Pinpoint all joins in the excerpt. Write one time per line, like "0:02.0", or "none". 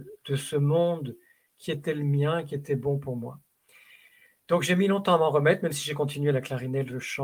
none